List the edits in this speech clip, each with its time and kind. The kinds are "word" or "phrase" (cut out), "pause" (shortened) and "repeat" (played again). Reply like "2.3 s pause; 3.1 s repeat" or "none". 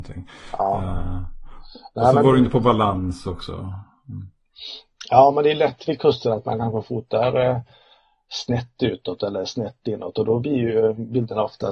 none